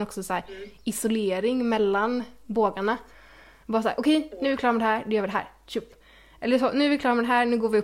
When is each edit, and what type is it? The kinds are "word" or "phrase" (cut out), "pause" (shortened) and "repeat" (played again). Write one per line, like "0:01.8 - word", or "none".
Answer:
none